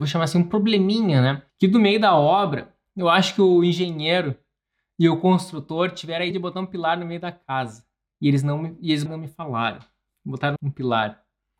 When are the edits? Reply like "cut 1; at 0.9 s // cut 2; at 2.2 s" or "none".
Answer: cut 1; at 1.5 s // cut 2; at 6.3 s // cut 3; at 8.1 s // cut 4; at 9.1 s // cut 5; at 10.6 s